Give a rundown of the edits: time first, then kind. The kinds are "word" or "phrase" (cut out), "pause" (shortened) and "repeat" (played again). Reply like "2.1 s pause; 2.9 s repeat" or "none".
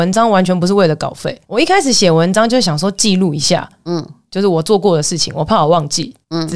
1.4 s word